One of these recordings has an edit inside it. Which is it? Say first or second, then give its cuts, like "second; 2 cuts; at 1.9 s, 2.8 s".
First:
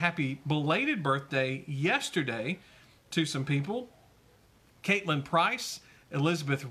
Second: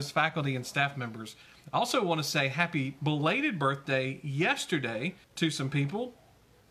second; 1 cut; at 5.2 s